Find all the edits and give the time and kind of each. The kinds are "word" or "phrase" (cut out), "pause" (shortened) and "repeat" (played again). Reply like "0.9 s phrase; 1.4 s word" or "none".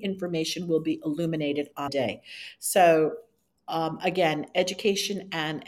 1.9 s phrase